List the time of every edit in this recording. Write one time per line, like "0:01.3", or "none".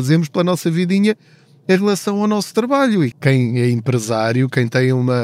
0:03.1